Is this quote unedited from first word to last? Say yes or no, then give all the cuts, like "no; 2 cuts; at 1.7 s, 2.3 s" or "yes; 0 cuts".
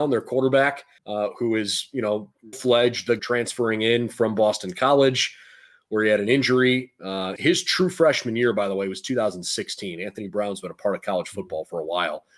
no; 4 cuts; at 1.0 s, 2.5 s, 3.2 s, 7.4 s